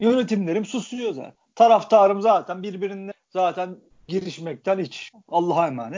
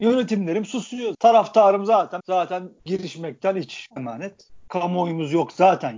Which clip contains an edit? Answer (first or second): second